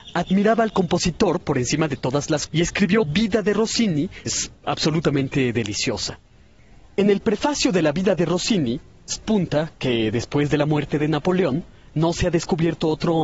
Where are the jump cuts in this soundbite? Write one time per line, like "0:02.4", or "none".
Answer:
0:02.5
0:03.0
0:04.3
0:09.2